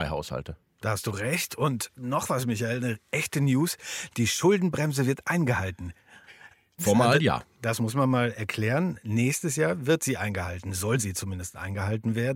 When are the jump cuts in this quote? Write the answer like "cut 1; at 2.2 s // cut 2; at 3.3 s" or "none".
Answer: cut 1; at 6.8 s